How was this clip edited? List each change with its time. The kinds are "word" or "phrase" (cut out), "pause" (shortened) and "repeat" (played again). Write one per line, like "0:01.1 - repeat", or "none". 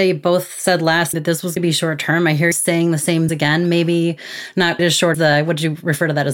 0:01.1 - word
0:01.6 - word
0:02.5 - word
0:03.3 - word
0:04.8 - word
0:05.1 - word